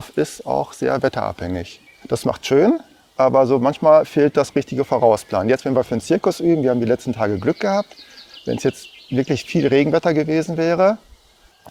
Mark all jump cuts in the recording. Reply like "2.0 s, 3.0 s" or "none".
1.9 s